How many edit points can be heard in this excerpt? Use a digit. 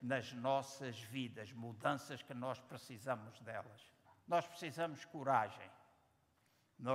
1